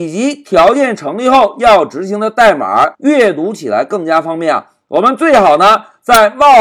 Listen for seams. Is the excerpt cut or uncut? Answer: cut